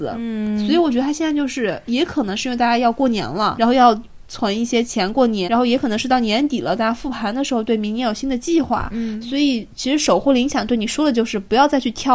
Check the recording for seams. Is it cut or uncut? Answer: cut